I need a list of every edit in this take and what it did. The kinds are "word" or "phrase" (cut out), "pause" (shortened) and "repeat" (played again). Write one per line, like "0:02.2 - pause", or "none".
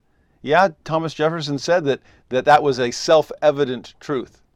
none